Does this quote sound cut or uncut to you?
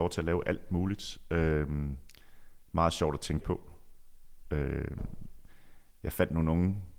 cut